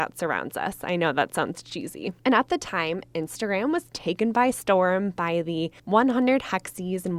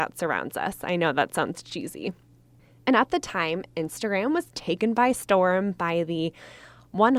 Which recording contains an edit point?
first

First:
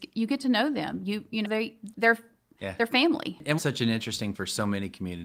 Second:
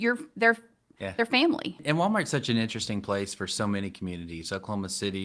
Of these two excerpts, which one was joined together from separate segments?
first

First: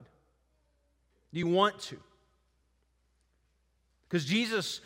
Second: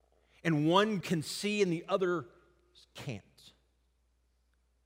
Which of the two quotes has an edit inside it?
second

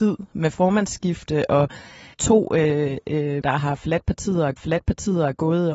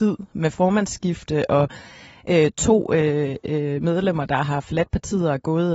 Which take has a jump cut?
first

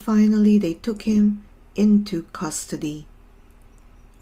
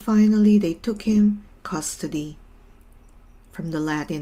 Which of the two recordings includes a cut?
second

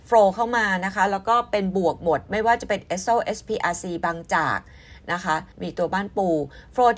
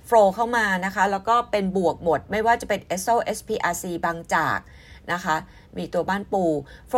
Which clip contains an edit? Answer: first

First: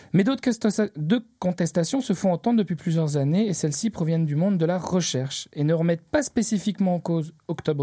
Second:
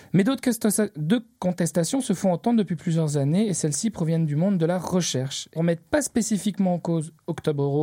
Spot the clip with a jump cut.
second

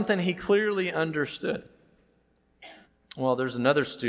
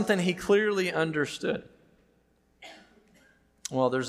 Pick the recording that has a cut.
first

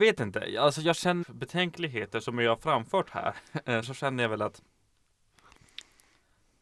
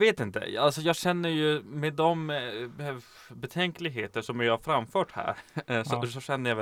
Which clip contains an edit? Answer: first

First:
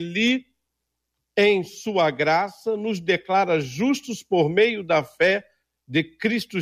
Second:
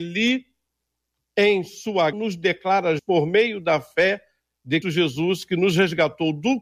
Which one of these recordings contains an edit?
second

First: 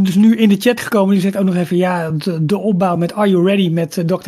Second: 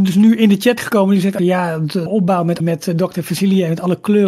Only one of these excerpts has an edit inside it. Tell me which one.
second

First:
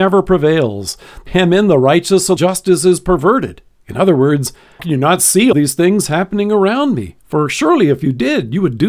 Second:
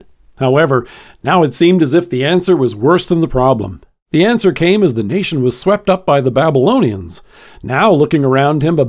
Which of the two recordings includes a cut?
first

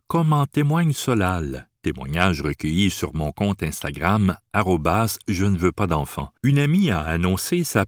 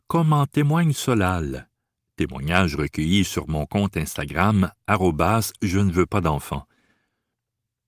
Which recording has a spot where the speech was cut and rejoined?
first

